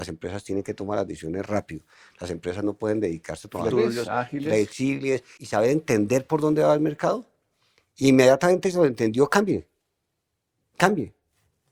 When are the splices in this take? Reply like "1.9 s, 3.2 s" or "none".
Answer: 3.7 s